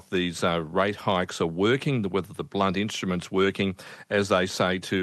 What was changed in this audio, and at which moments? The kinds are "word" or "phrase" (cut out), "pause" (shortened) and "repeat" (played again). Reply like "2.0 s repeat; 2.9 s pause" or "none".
none